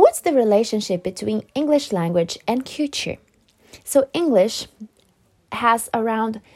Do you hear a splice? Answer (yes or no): no